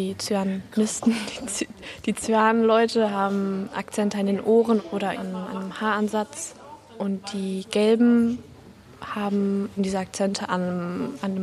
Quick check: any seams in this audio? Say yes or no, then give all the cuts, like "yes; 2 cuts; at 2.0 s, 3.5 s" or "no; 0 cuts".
yes; 3 cuts; at 3.7 s, 5.1 s, 9.8 s